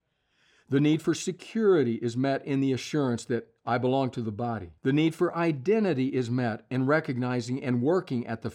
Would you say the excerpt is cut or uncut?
cut